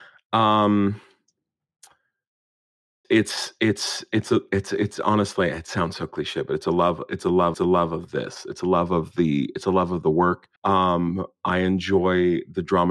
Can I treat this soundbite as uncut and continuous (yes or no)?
no